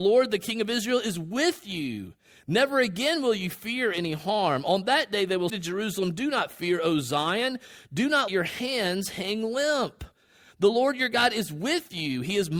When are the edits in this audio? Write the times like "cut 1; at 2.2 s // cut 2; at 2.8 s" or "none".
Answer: cut 1; at 5.5 s // cut 2; at 8.3 s